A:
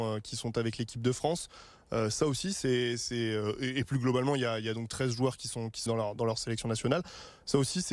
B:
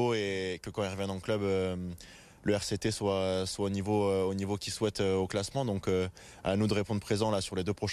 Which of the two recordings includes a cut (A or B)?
A